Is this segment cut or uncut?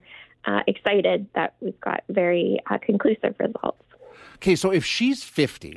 uncut